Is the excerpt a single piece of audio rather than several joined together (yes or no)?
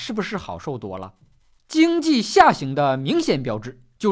yes